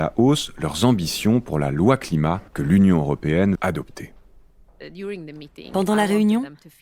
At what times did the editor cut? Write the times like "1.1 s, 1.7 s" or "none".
2.5 s, 3.6 s

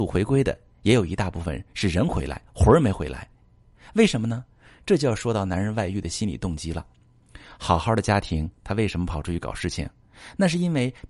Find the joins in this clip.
none

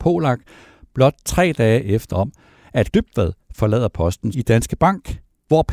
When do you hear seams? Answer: 2.1 s, 2.9 s, 4.3 s

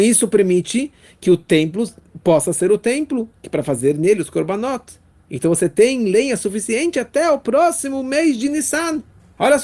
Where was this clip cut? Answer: none

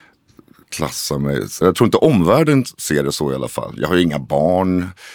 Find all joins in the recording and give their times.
1.6 s

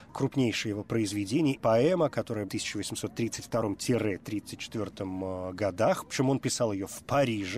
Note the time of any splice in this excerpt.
1.6 s, 2.5 s

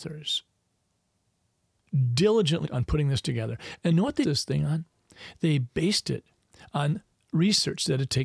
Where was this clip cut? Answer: 2.6 s, 3.9 s, 4.2 s

